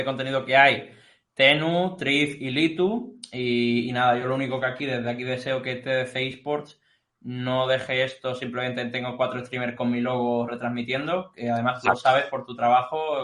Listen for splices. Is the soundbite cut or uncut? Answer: uncut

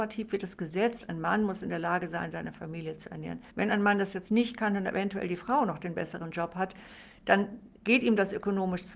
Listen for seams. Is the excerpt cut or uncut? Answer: cut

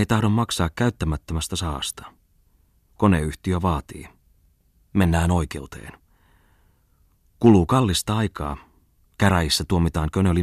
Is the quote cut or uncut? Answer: uncut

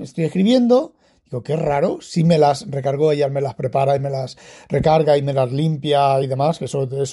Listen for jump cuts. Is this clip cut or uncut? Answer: uncut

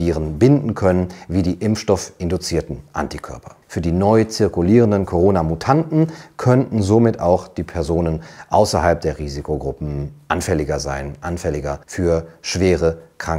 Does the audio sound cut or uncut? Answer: cut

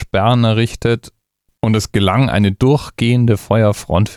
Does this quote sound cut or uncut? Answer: uncut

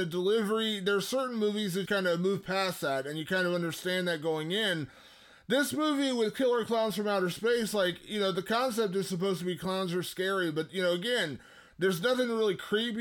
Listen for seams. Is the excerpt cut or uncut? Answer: cut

